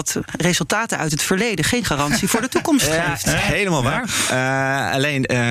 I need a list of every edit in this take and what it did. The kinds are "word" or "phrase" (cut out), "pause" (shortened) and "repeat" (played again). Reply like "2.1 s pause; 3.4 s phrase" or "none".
none